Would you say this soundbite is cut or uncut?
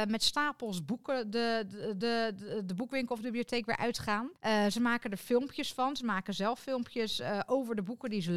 cut